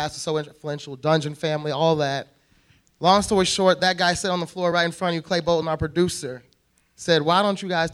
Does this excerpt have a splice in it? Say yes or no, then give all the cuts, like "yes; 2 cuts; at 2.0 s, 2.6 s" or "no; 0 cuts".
no; 0 cuts